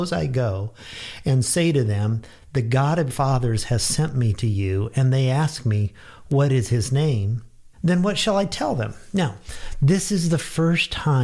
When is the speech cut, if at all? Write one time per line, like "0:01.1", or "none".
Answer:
0:03.1
0:07.7

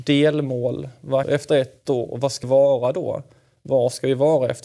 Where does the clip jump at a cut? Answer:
0:01.2
0:02.4

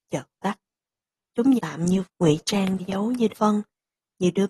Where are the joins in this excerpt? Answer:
0:01.6
0:02.0
0:02.8
0:03.3

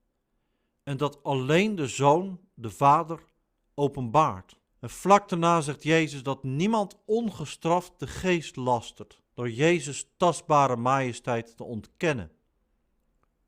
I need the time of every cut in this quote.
0:04.7
0:09.3

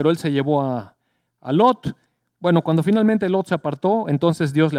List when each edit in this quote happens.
none

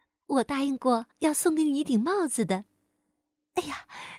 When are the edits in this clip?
0:01.1

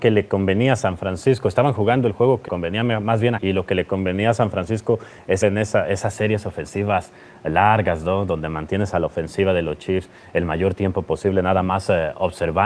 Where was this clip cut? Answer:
0:02.5
0:03.4
0:05.4

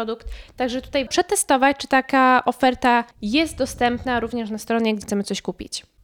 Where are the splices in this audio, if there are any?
0:01.1
0:03.1
0:05.0

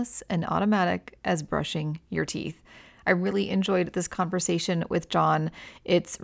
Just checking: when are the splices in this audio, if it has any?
none

